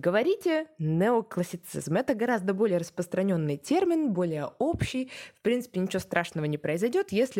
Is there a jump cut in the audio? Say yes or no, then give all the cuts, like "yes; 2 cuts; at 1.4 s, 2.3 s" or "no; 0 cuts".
no; 0 cuts